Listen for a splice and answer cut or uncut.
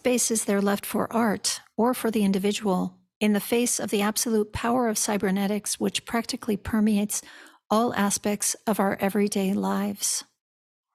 uncut